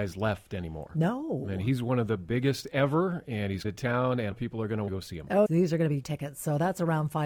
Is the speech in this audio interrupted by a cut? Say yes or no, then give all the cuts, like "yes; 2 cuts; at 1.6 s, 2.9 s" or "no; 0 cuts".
yes; 5 cuts; at 3.6 s, 4.3 s, 4.9 s, 5.5 s, 6.0 s